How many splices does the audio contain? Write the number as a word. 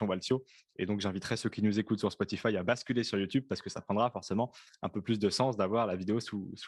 zero